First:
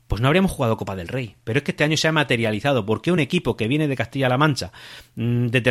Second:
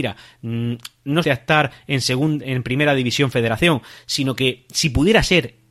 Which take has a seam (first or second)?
second